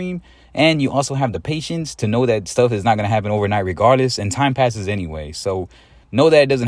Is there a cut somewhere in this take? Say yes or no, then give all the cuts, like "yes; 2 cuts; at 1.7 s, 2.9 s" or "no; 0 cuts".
no; 0 cuts